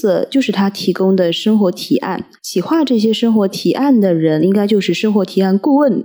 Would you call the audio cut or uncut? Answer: cut